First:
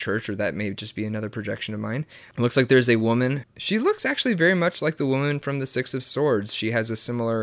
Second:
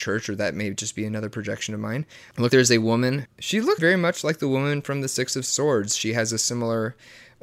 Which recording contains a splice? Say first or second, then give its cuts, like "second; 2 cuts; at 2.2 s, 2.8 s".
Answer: second; 2 cuts; at 2.5 s, 3.8 s